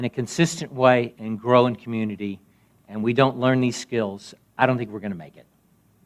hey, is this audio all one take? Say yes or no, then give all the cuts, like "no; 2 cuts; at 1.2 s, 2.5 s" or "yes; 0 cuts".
yes; 0 cuts